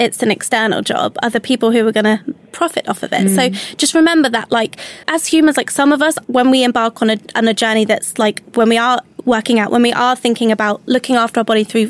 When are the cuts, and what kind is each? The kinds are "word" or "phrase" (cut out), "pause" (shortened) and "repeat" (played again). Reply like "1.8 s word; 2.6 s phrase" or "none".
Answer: 5.0 s pause; 6.2 s pause